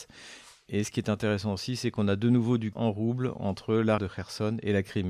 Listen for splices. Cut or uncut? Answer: cut